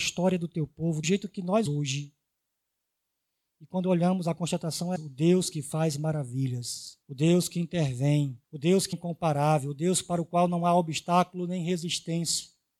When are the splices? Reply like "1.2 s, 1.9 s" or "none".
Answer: 1.0 s, 1.7 s, 5.0 s, 7.0 s, 8.4 s, 8.9 s